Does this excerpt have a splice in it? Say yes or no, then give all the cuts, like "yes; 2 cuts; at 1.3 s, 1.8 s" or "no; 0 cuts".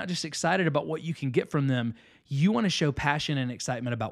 no; 0 cuts